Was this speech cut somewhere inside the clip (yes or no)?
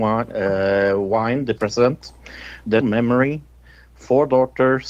yes